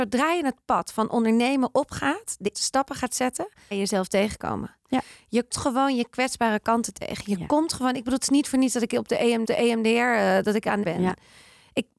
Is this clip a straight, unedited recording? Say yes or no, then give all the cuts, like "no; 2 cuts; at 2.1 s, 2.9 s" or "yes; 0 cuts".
no; 5 cuts; at 2.5 s, 3.7 s, 5.5 s, 9.4 s, 10.8 s